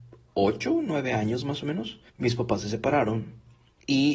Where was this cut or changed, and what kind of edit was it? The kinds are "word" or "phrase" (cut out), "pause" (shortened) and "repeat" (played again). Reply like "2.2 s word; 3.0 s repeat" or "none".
2.1 s pause